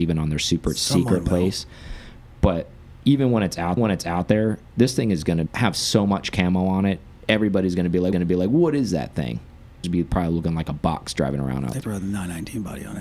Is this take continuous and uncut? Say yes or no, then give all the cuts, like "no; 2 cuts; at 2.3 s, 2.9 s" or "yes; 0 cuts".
no; 5 cuts; at 3.8 s, 5.5 s, 8.1 s, 9.8 s, 11.8 s